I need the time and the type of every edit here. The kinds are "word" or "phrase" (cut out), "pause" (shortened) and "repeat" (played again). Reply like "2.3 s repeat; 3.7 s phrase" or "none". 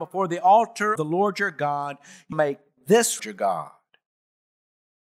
1.0 s word; 2.3 s word; 3.2 s phrase